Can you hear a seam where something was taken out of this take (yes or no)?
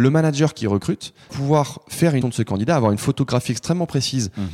yes